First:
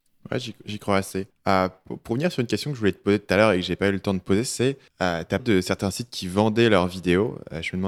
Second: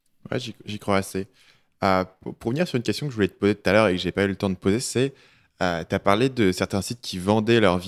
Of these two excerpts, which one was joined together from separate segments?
first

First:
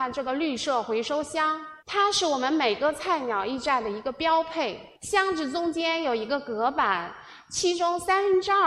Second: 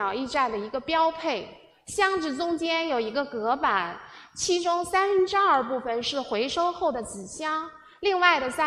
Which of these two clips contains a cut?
first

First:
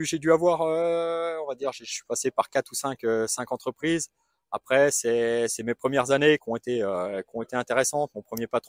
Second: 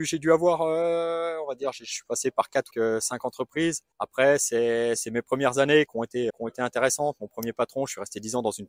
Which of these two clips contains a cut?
second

